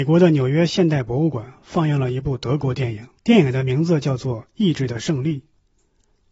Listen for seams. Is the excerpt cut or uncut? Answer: cut